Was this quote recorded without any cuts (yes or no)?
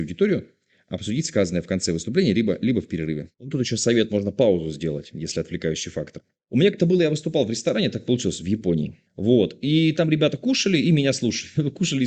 no